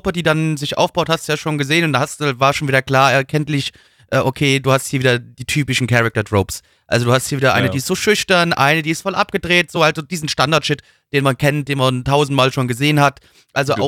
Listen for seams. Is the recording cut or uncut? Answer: uncut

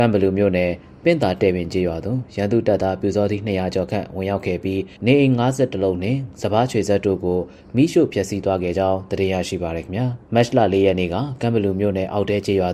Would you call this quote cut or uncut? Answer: cut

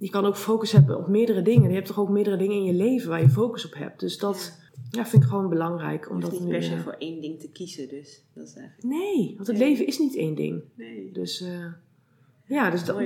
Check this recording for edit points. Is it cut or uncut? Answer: cut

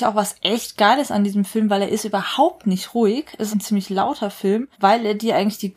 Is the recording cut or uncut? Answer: cut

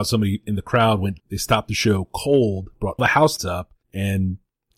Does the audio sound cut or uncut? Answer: cut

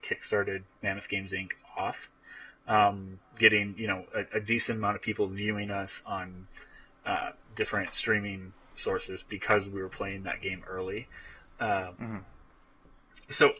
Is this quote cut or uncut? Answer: uncut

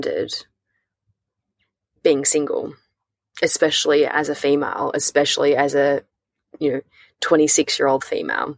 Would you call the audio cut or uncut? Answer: uncut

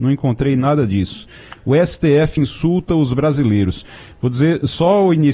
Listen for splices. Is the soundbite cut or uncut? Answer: uncut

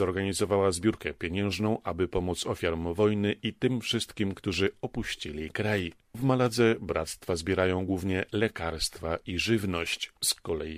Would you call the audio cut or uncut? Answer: uncut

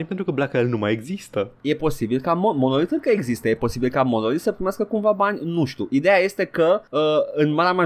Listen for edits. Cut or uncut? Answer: uncut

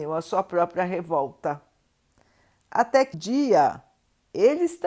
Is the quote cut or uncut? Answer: cut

